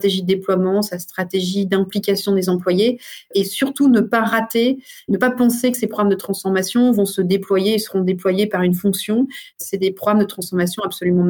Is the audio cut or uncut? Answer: uncut